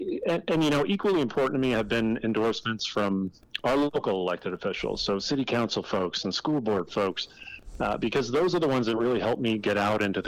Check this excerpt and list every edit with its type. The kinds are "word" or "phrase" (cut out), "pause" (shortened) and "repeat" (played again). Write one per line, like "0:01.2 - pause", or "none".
none